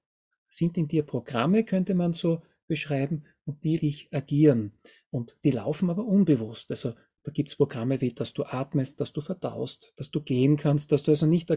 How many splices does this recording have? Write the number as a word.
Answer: one